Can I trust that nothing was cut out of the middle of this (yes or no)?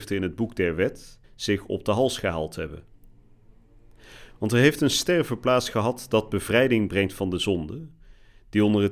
no